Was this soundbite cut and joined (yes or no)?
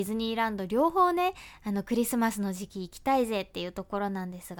no